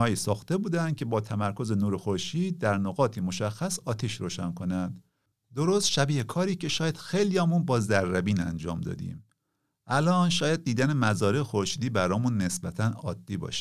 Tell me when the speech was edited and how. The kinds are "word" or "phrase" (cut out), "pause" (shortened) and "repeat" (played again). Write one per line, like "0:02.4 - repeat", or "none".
none